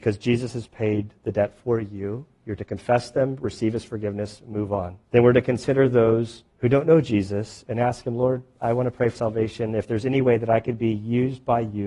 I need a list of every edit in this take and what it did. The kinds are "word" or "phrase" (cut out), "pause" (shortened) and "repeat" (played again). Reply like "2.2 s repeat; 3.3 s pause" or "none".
5.0 s pause; 6.5 s pause; 9.2 s word